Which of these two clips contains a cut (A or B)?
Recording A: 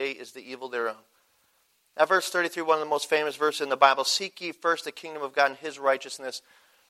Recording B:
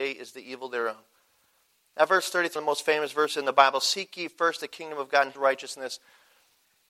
B